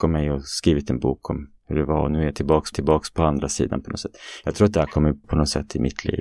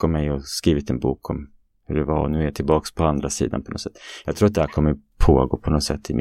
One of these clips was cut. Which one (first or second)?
first